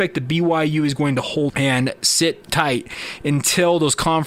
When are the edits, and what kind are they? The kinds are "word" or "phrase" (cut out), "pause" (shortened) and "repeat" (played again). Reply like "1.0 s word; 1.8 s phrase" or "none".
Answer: 1.5 s word